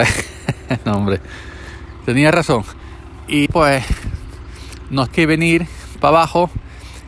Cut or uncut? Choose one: cut